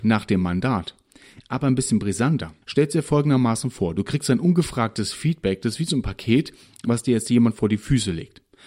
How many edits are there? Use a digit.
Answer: 1